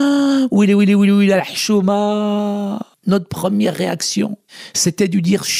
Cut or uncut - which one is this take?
uncut